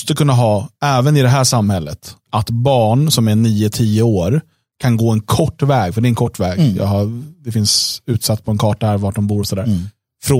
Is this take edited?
no; 0 cuts

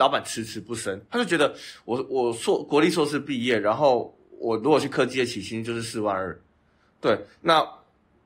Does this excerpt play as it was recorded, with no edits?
yes; 0 cuts

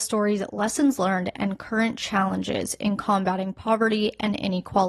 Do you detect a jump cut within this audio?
no; 0 cuts

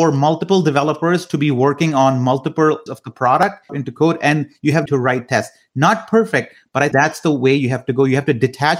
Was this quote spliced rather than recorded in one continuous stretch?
yes; 4 cuts; at 2.9 s, 3.7 s, 4.9 s, 6.9 s

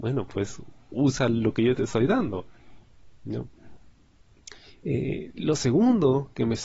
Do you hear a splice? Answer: no; 0 cuts

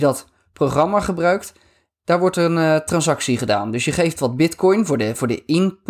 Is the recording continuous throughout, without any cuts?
yes; 0 cuts

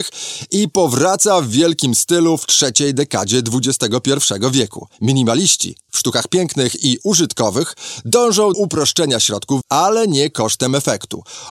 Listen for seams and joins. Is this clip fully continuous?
no; 3 cuts; at 4.9 s, 8.5 s, 9.6 s

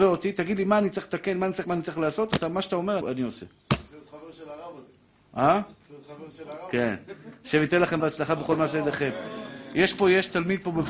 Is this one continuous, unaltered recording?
no; 3 cuts; at 1.6 s, 3.0 s, 8.0 s

